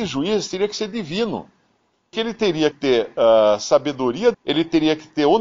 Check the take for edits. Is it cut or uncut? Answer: cut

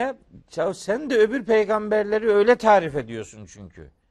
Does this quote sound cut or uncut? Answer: uncut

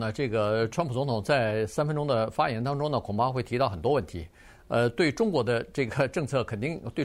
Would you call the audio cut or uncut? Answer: uncut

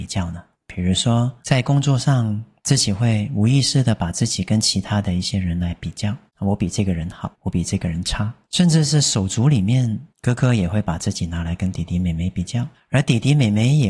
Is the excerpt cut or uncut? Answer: cut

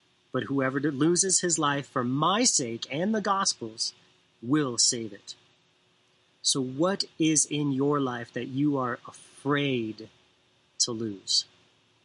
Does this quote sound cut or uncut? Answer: cut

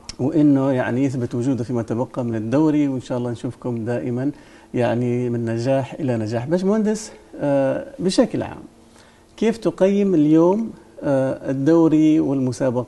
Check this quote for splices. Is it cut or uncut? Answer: uncut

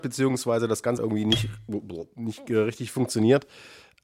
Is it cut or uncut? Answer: cut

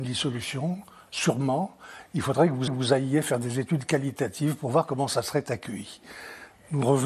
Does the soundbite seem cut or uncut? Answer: cut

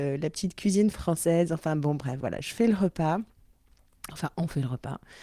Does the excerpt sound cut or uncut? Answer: uncut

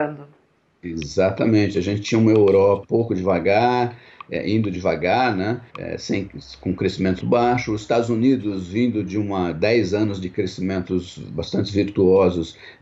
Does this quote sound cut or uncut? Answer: cut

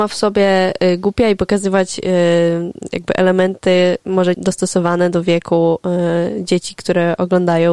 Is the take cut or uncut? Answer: cut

